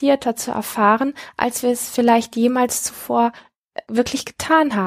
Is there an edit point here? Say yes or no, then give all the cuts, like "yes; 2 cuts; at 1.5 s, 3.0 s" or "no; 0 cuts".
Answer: yes; 1 cut; at 3.8 s